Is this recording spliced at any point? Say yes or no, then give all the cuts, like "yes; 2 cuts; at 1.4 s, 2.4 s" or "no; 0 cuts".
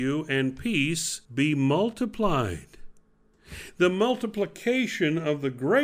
yes; 1 cut; at 1.2 s